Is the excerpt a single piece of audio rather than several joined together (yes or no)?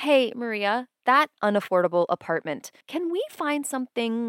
no